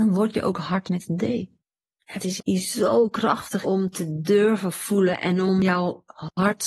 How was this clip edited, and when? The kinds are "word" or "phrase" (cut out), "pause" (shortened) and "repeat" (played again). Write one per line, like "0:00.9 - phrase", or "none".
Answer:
0:01.7 - pause
0:02.4 - phrase
0:03.6 - word